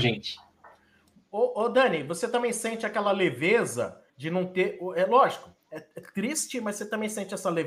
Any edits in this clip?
yes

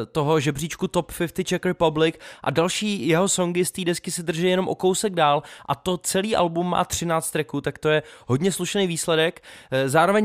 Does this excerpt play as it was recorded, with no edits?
yes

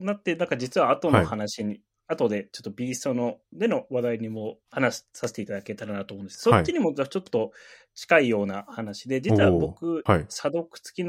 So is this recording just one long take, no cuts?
no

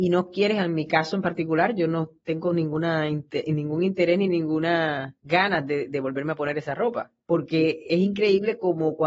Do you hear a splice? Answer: yes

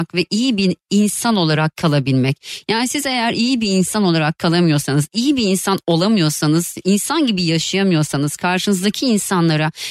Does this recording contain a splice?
no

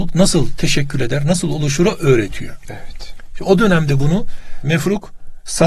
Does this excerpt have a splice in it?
no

